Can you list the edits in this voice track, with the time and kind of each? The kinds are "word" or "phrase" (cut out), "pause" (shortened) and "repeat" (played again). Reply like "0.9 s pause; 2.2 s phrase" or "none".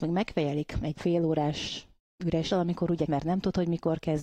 1.0 s word; 2.5 s word; 3.1 s word